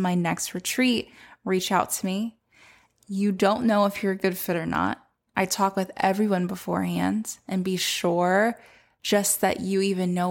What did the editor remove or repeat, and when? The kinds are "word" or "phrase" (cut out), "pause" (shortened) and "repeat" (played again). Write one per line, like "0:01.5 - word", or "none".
none